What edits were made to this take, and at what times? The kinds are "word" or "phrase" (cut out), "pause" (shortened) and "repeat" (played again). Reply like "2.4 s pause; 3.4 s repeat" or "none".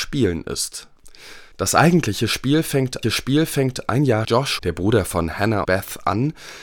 1.5 s pause; 3.0 s repeat; 4.2 s phrase; 4.6 s word; 5.6 s word